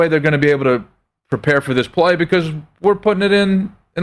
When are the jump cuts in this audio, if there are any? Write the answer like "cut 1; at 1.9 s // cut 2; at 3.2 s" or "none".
none